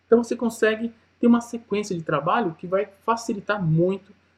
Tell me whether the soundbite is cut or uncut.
uncut